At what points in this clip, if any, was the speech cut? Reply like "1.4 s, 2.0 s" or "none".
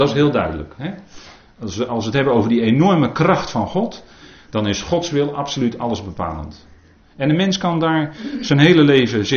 none